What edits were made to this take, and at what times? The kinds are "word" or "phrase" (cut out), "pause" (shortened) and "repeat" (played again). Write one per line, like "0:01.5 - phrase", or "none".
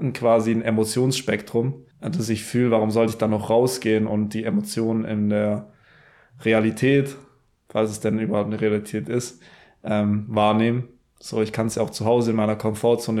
0:01.9 - pause